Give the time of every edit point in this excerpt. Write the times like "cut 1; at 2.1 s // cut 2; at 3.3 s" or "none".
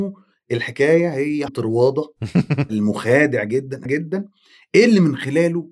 cut 1; at 1.5 s // cut 2; at 3.8 s